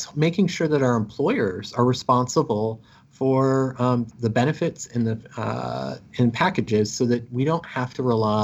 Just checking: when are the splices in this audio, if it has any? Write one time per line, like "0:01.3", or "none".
0:04.1